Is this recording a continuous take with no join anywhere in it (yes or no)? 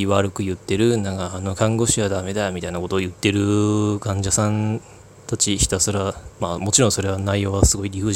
yes